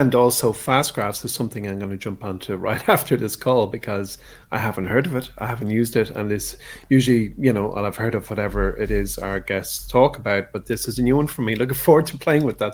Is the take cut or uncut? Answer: uncut